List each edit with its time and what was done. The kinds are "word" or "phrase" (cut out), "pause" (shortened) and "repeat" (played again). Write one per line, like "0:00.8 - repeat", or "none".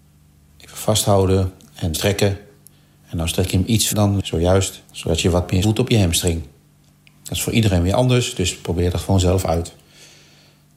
0:01.9 - phrase
0:03.9 - word
0:04.8 - pause
0:05.6 - word
0:06.8 - pause